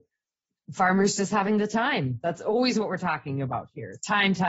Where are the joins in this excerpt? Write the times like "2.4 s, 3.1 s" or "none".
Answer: none